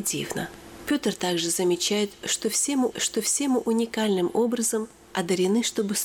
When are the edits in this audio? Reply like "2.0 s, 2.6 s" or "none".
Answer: 2.9 s